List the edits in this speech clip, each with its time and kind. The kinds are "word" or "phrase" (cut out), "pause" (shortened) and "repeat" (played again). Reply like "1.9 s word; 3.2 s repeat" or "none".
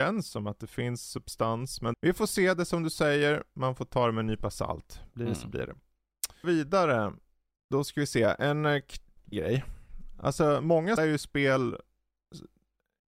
1.9 s word; 6.4 s word; 9.3 s word; 11.0 s word